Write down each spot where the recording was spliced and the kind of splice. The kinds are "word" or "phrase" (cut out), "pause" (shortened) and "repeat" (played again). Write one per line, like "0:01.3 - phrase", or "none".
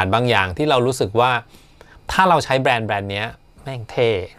none